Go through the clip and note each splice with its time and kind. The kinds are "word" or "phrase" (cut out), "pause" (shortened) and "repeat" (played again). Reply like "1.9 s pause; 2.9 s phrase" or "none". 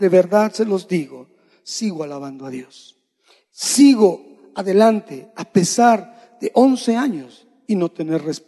none